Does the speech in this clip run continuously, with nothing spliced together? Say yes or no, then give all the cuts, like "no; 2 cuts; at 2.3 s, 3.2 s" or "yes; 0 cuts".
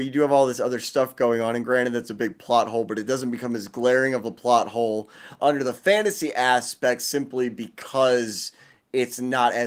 yes; 0 cuts